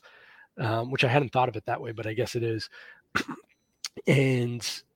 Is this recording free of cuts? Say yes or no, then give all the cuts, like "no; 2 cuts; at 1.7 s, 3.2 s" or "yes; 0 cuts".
yes; 0 cuts